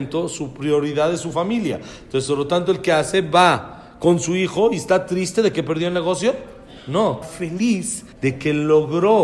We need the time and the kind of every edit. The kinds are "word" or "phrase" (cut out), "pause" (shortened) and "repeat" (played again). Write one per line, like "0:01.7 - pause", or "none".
0:07.2 - word
0:08.1 - pause